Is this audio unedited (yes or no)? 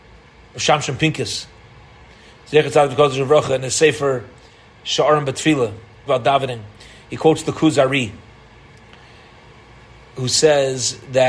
no